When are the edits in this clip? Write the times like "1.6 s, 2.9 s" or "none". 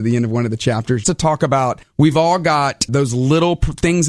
1.0 s, 2.9 s

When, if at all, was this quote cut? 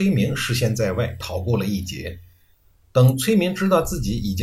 none

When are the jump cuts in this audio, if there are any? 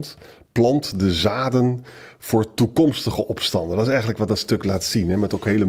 none

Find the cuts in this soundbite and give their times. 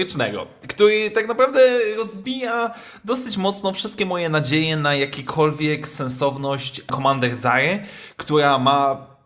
6.9 s

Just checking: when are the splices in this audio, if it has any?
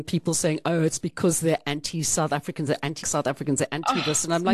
3.0 s

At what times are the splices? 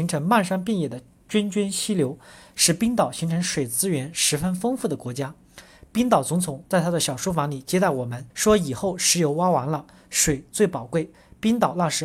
8.3 s

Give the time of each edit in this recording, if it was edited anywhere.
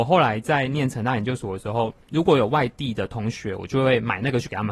2.0 s

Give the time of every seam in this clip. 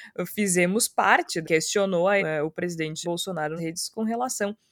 1.4 s, 2.2 s, 3.0 s, 3.6 s

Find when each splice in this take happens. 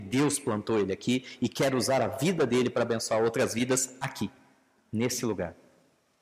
none

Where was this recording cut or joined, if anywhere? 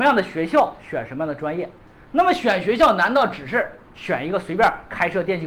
3.8 s

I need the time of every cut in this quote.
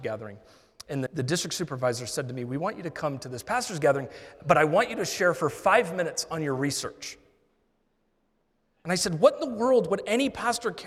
1.1 s

